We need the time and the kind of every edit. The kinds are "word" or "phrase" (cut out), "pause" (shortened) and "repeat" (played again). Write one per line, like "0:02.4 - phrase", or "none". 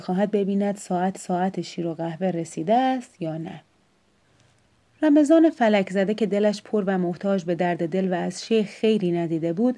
0:01.2 - repeat